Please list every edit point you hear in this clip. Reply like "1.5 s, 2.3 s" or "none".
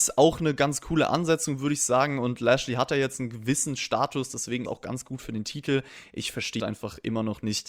4.7 s, 6.6 s